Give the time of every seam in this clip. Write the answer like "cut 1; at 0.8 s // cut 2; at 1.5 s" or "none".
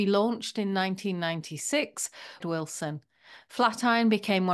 cut 1; at 2.4 s